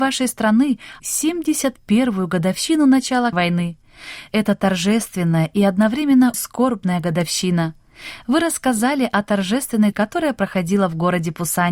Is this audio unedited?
no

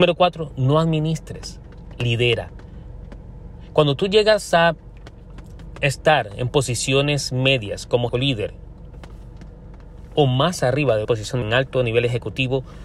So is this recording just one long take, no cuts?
no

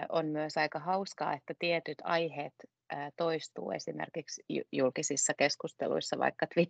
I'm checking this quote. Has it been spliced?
no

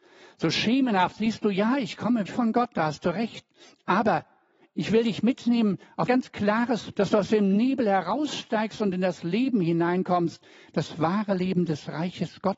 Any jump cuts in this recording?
yes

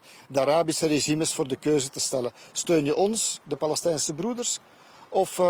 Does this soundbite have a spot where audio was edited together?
no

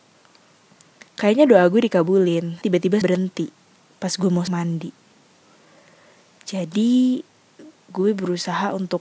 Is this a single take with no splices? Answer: no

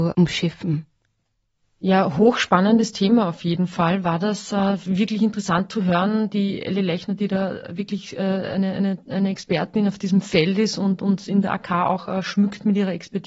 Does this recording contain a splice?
no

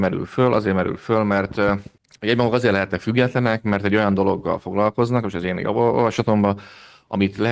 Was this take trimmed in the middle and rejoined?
yes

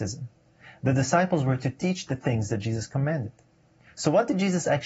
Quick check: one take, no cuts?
yes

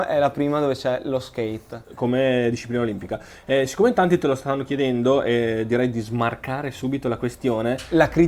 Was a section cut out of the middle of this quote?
no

